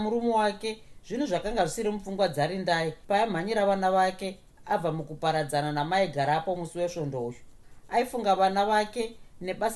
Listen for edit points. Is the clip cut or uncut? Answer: uncut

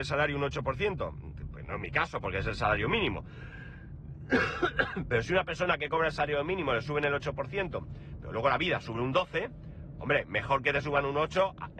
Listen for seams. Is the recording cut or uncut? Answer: uncut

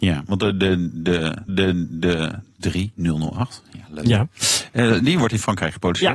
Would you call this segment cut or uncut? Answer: cut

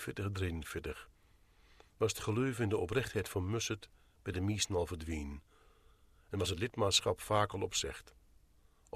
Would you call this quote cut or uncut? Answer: uncut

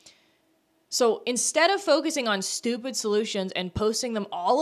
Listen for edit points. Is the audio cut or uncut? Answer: uncut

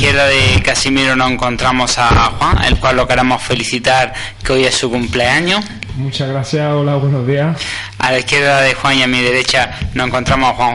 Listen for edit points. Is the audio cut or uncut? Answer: uncut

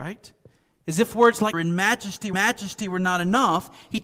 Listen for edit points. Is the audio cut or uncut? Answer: cut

